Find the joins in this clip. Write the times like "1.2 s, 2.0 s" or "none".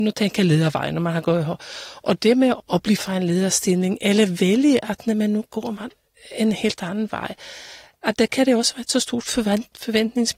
2.6 s, 3.0 s

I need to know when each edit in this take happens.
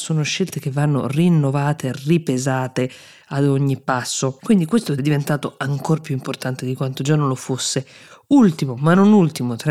5.0 s

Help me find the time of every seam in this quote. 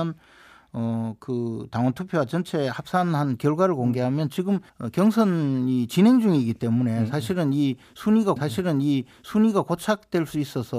4.7 s, 8.4 s

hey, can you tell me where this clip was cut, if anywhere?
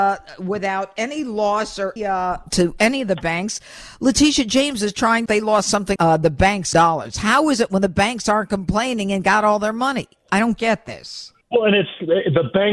2.0 s, 2.4 s, 5.3 s, 6.0 s, 6.7 s, 11.4 s

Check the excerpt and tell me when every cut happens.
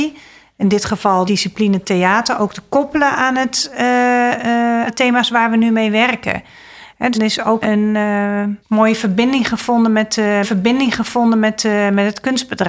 1.3 s, 4.9 s, 7.1 s, 7.6 s, 8.6 s, 10.4 s

